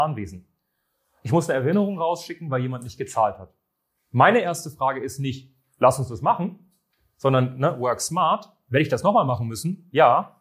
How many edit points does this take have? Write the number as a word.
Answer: zero